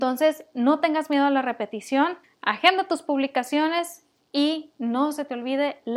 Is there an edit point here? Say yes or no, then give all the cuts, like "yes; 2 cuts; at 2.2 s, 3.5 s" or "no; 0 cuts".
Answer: yes; 1 cut; at 2.2 s